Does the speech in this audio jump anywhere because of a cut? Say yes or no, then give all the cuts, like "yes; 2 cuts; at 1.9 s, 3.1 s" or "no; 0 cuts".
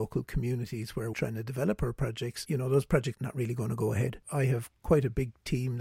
yes; 3 cuts; at 1.1 s, 2.5 s, 3.1 s